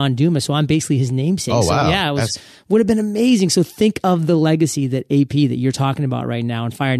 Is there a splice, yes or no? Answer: no